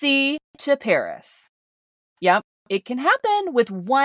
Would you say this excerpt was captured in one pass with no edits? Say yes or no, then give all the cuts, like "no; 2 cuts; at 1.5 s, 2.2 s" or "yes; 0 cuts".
yes; 0 cuts